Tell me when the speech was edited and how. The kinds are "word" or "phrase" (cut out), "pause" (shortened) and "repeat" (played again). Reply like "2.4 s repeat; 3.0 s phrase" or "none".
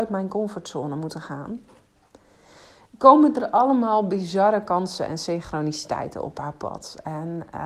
none